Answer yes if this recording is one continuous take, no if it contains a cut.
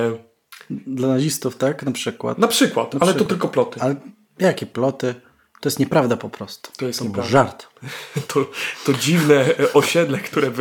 yes